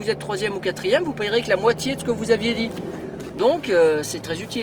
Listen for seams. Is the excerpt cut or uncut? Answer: uncut